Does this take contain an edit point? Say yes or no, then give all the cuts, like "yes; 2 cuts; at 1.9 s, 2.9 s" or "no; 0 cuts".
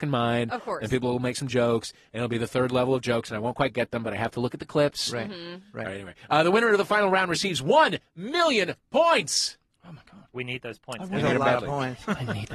no; 0 cuts